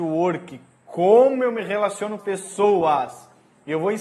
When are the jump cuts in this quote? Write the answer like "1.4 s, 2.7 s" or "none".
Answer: 2.2 s